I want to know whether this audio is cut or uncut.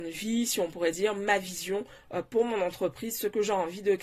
uncut